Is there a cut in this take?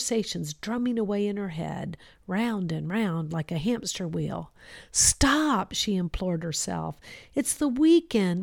no; 0 cuts

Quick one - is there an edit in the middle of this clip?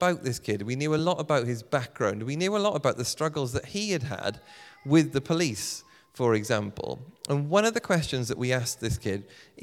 no; 0 cuts

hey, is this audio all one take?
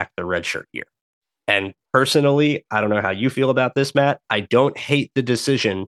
yes; 0 cuts

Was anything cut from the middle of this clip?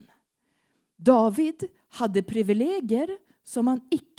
no; 0 cuts

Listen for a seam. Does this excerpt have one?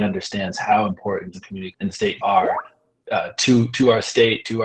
yes; 4 cuts; at 1.3 s, 1.7 s, 2.2 s, 3.0 s

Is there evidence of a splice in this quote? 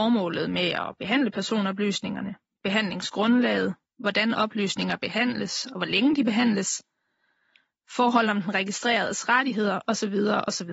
no; 0 cuts

